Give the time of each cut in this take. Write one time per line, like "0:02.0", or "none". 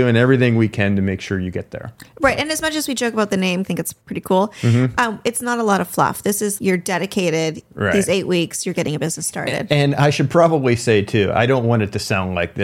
0:03.6
0:04.0
0:06.6

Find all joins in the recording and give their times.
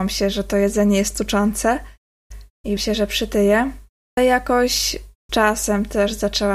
0:02.8
0:04.2
0:05.3

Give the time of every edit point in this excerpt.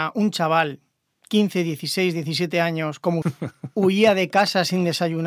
0:03.2

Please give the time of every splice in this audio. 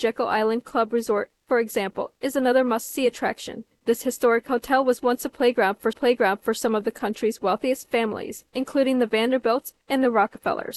0:05.9
0:09.8

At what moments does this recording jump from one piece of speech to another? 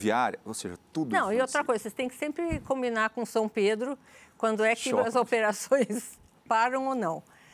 none

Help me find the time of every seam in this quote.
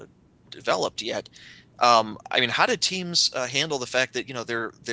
none

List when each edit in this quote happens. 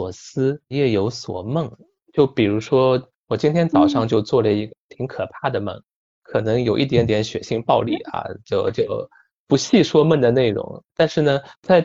none

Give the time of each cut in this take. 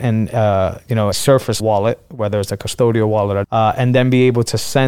0:01.1
0:01.6
0:03.4

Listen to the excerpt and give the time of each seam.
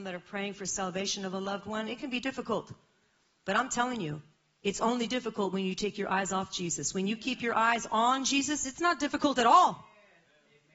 none

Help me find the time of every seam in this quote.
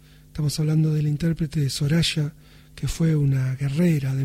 none

